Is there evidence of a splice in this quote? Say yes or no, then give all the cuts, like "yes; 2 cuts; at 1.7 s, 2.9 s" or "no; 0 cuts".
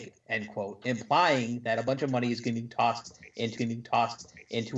yes; 1 cut; at 3.6 s